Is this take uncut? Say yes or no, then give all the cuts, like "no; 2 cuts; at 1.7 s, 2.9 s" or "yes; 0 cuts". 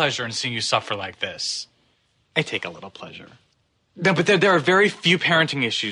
yes; 0 cuts